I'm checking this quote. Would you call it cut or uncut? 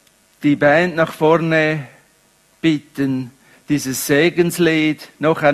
uncut